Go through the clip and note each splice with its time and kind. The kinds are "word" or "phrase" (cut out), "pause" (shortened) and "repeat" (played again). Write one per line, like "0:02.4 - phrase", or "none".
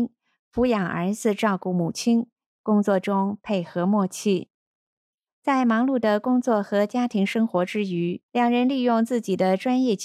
0:08.2 - pause